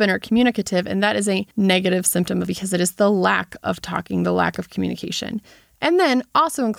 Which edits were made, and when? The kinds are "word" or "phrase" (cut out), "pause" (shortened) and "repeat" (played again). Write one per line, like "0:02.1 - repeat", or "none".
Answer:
0:01.5 - pause
0:02.5 - word